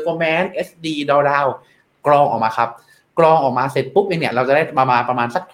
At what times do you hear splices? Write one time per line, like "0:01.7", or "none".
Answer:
none